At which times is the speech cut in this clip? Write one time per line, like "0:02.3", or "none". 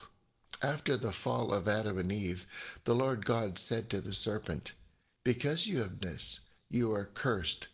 0:06.0